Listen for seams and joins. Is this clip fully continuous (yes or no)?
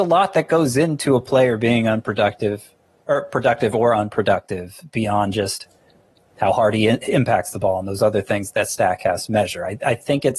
yes